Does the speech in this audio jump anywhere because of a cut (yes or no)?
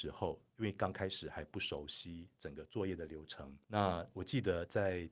yes